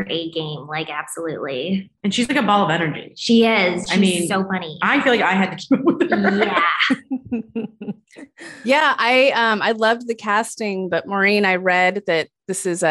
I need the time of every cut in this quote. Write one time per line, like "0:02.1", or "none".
0:02.0